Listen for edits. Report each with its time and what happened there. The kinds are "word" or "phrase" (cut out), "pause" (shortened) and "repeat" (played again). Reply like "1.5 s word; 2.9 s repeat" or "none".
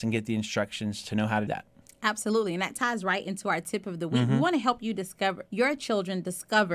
1.5 s word; 5.5 s word